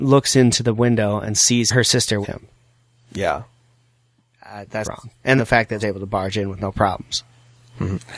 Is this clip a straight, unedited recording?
no; 4 cuts; at 2.2 s, 4.8 s, 5.4 s, 5.8 s

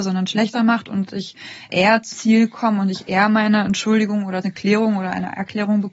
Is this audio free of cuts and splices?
no; 2 cuts; at 2.1 s, 4.4 s

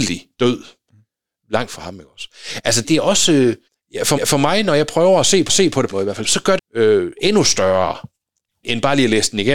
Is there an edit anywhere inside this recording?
yes; 9 cuts; at 1.7 s, 2.8 s, 3.7 s, 4.2 s, 5.5 s, 5.9 s, 6.2 s, 6.6 s, 8.6 s

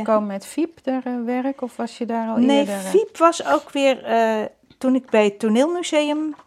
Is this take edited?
no; 0 cuts

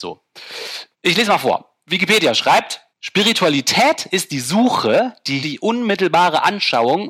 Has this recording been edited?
yes; 3 cuts; at 0.9 s, 2.9 s, 5.4 s

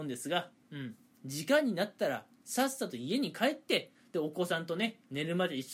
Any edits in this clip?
no; 0 cuts

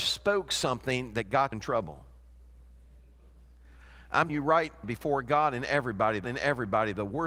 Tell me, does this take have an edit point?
yes; 4 cuts; at 1.5 s, 4.3 s, 4.8 s, 6.2 s

